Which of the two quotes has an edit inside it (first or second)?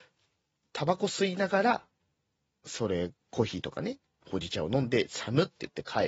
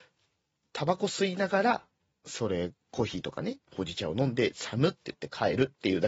second